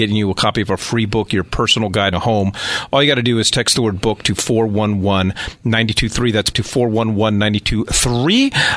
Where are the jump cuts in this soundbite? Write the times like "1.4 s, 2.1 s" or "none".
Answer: 2.1 s, 6.5 s